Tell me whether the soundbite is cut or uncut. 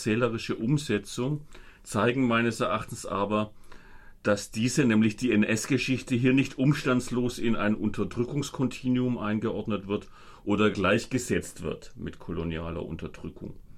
cut